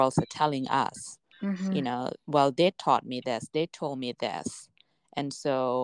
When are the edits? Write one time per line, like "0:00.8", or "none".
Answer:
none